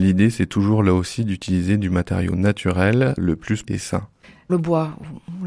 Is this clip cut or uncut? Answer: cut